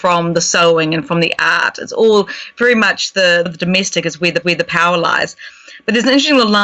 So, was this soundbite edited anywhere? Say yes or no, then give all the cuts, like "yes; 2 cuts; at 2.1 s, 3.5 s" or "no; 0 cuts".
yes; 2 cuts; at 3.5 s, 4.4 s